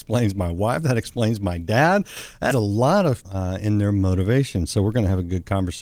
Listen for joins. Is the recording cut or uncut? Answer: cut